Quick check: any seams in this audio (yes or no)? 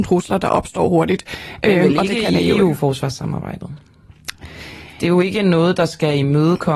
no